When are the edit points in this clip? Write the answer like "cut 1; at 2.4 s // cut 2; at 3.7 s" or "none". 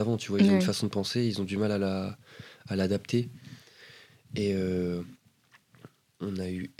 none